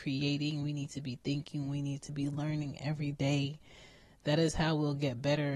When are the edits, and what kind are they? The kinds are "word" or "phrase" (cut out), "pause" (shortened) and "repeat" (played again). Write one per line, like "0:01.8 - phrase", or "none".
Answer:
none

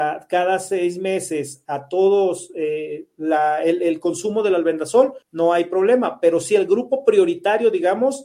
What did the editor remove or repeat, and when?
0:05.2 - pause

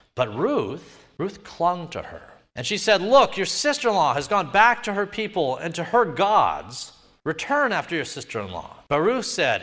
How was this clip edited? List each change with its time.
none

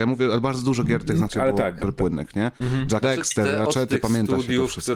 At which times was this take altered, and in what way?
0:01.3 - word
0:01.8 - word
0:03.0 - word

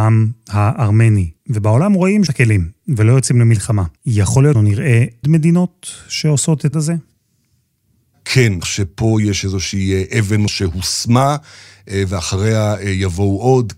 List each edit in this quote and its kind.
0:01.4 - pause
0:02.3 - phrase
0:04.0 - pause
0:04.5 - word
0:05.2 - word
0:06.7 - word
0:08.6 - phrase
0:10.5 - word

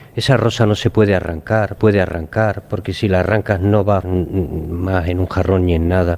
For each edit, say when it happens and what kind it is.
0:01.8 - repeat
0:04.0 - word

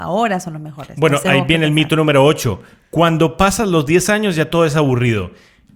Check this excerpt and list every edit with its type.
none

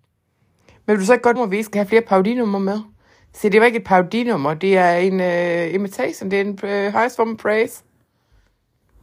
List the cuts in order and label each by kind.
0:01.4 - word

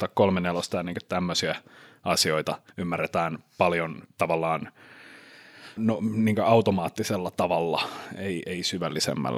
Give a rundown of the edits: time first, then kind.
0:02.7 - pause
0:05.8 - word

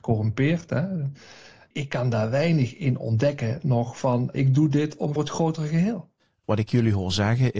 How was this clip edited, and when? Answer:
0:04.3 - word
0:05.2 - word

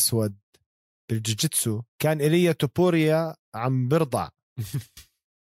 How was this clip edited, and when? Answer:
0:01.9 - pause
0:03.4 - pause

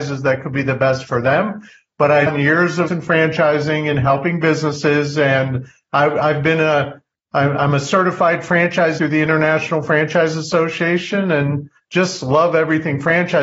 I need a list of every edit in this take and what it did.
0:01.1 - word
0:02.3 - word
0:02.9 - word
0:09.0 - word

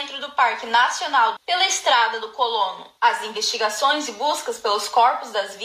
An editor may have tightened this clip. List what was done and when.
0:01.4 - word

